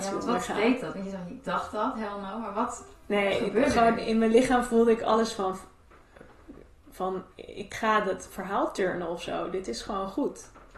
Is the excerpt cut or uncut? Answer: cut